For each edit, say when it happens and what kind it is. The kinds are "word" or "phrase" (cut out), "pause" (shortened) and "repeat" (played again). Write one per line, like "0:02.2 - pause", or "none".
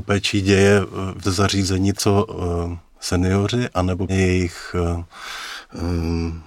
0:01.2 - word
0:02.0 - word
0:04.1 - word